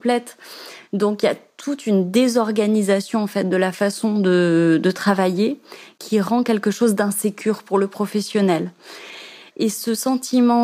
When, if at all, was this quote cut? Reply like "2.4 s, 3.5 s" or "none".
none